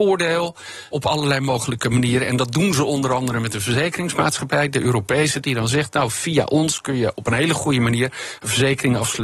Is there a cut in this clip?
yes; 1 cut; at 0.9 s

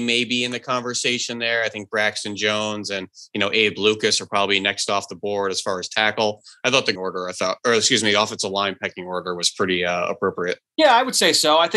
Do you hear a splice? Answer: yes; 1 cut; at 7.0 s

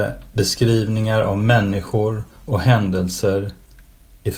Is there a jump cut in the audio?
no; 0 cuts

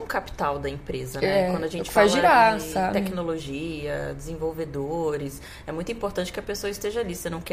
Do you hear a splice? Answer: no; 0 cuts

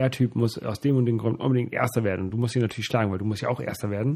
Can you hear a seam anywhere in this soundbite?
no; 0 cuts

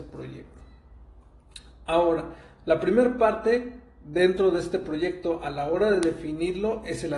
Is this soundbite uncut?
yes; 0 cuts

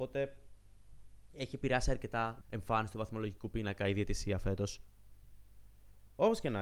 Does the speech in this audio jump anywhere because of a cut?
yes; 1 cut; at 2.4 s

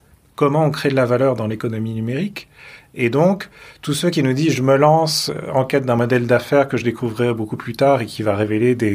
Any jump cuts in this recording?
no; 0 cuts

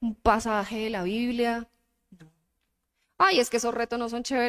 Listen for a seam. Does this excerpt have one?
no; 0 cuts

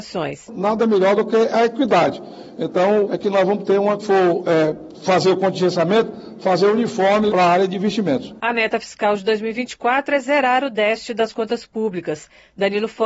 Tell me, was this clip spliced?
yes; 3 cuts; at 3.1 s, 4.0 s, 7.3 s

